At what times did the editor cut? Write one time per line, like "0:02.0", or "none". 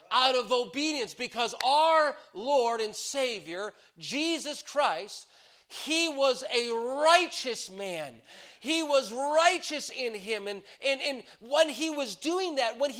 none